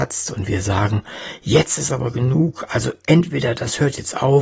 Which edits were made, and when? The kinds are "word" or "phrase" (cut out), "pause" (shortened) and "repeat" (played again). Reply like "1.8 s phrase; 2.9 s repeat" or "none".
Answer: none